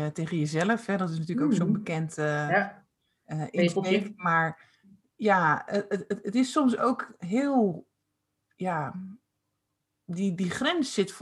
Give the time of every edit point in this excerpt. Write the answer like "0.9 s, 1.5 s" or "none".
none